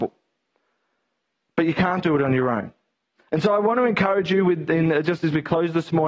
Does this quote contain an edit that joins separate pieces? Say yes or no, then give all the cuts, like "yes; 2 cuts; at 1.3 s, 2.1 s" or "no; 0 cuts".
no; 0 cuts